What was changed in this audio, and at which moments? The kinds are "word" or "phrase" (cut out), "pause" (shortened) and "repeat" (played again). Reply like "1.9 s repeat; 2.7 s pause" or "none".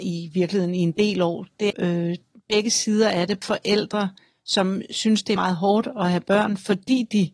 1.7 s word; 3.4 s word; 5.4 s word

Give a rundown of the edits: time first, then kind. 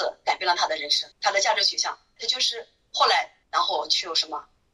1.1 s pause; 2.2 s word; 3.4 s pause

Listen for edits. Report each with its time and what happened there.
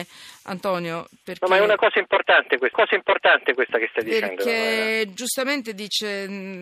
2.7 s repeat

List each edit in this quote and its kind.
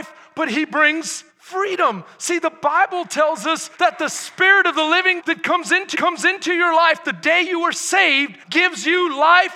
1.3 s pause; 3.7 s pause; 5.2 s word; 5.9 s repeat; 8.4 s pause

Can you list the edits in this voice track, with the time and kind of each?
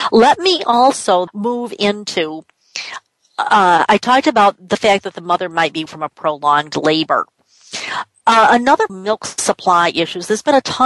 1.3 s word; 3.9 s word; 5.9 s phrase; 8.9 s phrase

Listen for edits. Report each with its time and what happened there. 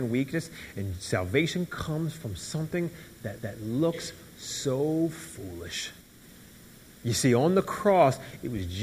3.4 s repeat

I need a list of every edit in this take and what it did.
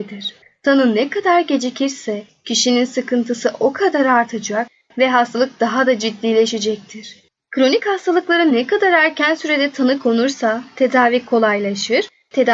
none

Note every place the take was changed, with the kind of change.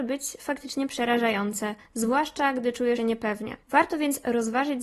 1.8 s pause; 3.0 s word; 3.6 s pause

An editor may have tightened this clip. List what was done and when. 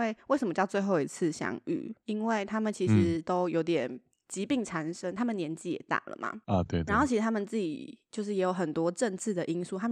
6.7 s word

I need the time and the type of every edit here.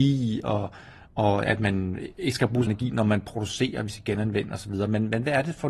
2.7 s word

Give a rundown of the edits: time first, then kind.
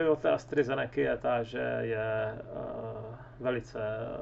none

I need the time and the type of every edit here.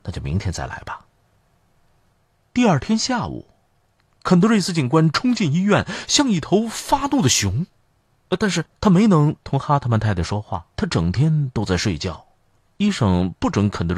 1.1 s pause; 8.8 s pause; 10.7 s pause

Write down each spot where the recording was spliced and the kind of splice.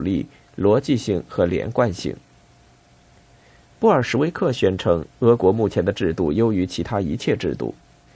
none

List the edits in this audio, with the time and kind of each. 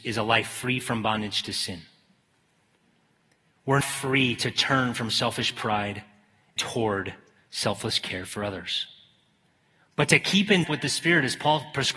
3.8 s word; 6.6 s word; 10.6 s word

